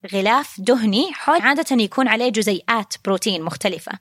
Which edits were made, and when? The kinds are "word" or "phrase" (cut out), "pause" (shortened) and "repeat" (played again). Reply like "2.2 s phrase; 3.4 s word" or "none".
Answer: 1.4 s phrase